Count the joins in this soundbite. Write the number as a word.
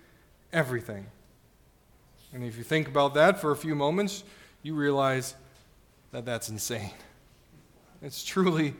zero